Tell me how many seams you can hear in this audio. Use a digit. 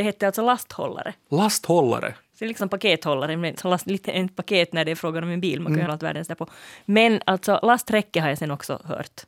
4